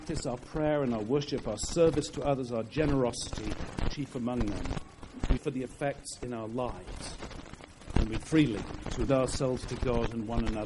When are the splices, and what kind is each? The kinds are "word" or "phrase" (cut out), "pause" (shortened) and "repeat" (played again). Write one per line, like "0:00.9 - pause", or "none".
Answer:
0:05.4 - word
0:08.2 - word
0:09.1 - word